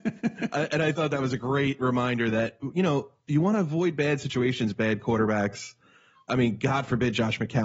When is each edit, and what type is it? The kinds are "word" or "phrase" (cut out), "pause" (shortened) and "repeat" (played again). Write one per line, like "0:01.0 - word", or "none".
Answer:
none